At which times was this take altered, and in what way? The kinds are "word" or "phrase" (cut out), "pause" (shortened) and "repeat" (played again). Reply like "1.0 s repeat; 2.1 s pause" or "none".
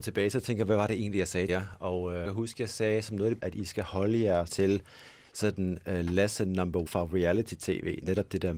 1.5 s word; 2.3 s word; 3.4 s word; 4.5 s word; 6.9 s word